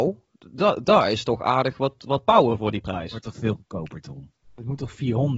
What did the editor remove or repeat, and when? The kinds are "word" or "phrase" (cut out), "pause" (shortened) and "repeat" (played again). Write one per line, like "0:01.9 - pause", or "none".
none

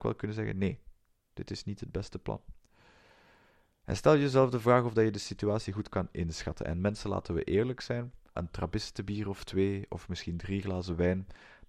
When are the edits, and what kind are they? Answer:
0:08.3 - word

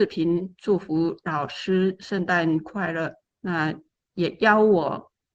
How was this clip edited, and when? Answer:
0:03.2 - pause

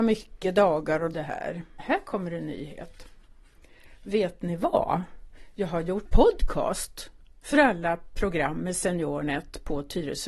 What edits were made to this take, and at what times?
0:01.1 - word
0:01.8 - word
0:06.1 - word

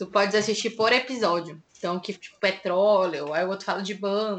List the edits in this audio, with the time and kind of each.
0:01.7 - pause
0:02.1 - phrase

